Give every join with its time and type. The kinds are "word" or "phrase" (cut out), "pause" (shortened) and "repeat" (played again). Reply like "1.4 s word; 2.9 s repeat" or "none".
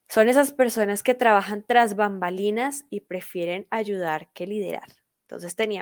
none